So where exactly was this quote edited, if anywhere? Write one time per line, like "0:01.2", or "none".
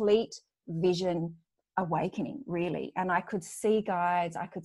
0:01.5